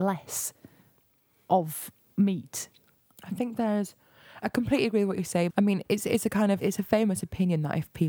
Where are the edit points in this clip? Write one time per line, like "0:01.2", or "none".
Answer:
0:04.4
0:05.5
0:06.6